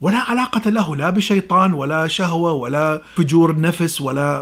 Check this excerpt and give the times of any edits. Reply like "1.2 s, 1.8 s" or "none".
none